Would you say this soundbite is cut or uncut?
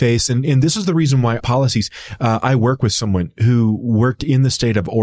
cut